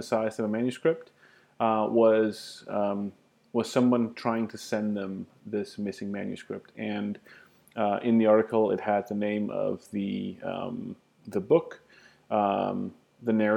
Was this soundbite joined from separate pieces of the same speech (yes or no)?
no